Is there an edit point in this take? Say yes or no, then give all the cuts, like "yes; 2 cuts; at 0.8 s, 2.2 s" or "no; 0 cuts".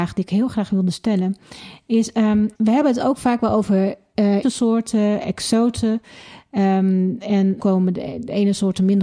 yes; 3 cuts; at 2.5 s, 4.4 s, 7.6 s